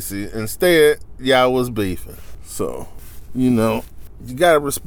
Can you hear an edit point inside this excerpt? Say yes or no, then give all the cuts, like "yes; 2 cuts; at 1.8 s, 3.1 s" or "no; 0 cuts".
no; 0 cuts